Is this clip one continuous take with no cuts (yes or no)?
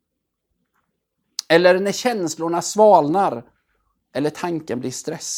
yes